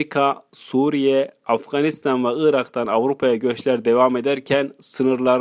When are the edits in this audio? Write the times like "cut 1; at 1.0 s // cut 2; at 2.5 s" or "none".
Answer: none